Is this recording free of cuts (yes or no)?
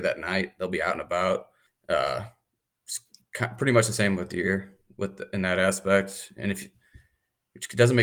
no